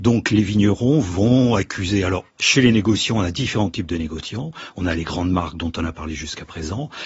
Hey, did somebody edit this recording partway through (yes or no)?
yes